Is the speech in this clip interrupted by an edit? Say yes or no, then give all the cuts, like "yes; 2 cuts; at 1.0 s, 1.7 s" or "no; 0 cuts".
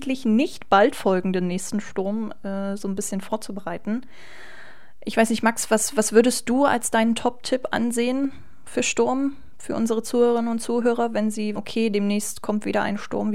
yes; 1 cut; at 11.6 s